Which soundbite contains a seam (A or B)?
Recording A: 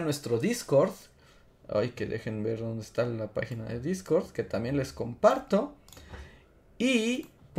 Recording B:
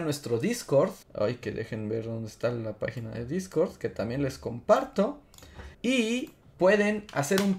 B